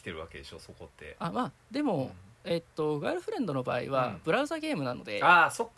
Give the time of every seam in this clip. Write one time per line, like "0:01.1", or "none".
0:02.3